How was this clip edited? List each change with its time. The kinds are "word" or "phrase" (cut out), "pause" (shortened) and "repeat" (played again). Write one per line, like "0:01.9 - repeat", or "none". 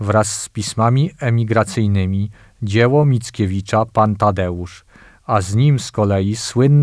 none